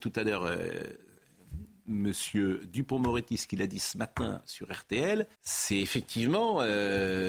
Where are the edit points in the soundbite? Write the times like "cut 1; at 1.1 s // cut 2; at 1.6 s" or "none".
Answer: cut 1; at 5.3 s

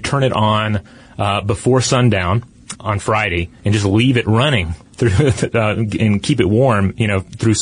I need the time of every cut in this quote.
cut 1; at 2.8 s // cut 2; at 4.9 s

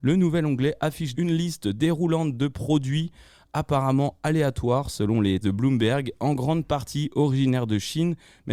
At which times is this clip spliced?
cut 1; at 1.1 s // cut 2; at 5.4 s

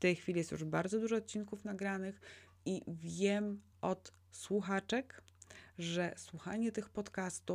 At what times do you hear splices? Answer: none

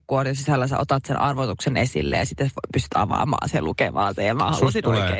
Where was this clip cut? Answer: none

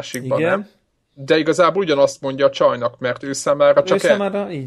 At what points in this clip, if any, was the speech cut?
none

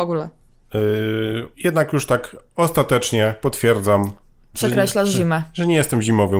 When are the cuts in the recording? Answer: cut 1; at 1.5 s

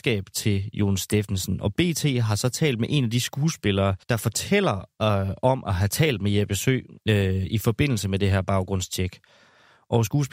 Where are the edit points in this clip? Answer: cut 1; at 4.0 s // cut 2; at 7.0 s

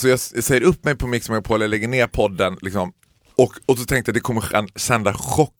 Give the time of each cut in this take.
none

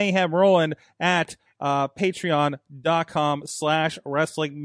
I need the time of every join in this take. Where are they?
none

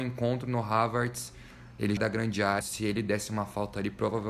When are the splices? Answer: cut 1; at 2.0 s // cut 2; at 2.6 s

